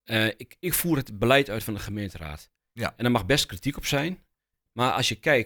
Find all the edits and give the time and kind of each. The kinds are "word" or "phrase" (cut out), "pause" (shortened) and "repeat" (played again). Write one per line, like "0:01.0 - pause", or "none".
none